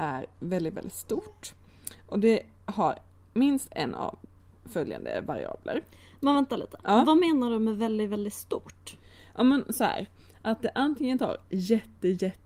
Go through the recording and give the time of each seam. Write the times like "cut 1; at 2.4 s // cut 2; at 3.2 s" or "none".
none